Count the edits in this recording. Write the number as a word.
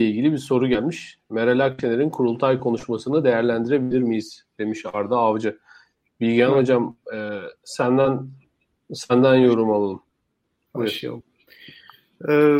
zero